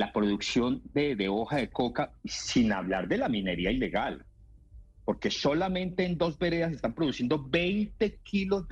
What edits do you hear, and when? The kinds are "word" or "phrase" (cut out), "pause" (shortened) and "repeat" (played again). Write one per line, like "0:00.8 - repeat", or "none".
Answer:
none